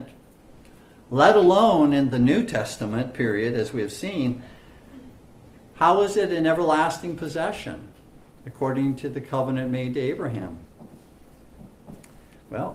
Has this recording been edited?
no; 0 cuts

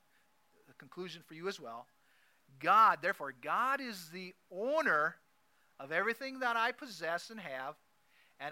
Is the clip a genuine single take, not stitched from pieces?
yes; 0 cuts

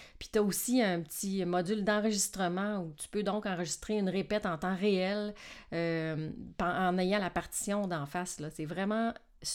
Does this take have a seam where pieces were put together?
no; 0 cuts

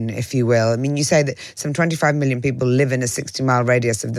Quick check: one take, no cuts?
yes; 0 cuts

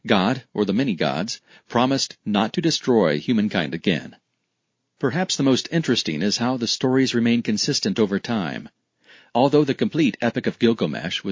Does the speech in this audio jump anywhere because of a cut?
no; 0 cuts

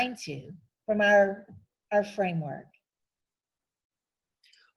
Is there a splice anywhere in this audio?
no; 0 cuts

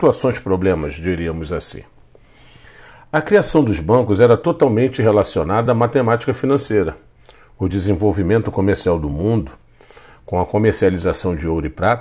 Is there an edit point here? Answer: no; 0 cuts

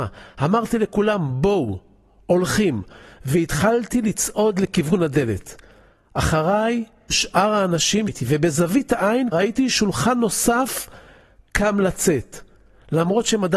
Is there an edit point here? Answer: yes; 3 cuts; at 7.1 s, 8.1 s, 9.3 s

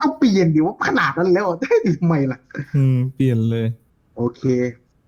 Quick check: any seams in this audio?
no; 0 cuts

